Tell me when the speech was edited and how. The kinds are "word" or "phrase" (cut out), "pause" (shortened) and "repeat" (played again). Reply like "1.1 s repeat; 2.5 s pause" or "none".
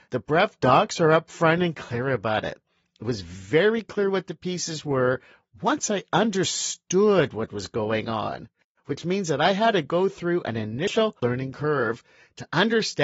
none